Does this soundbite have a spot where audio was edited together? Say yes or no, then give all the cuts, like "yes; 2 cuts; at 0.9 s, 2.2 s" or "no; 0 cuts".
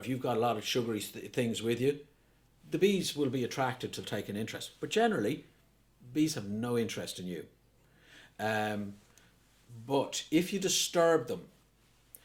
yes; 1 cut; at 4.0 s